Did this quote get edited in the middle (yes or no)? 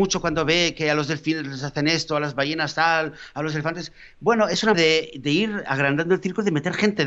yes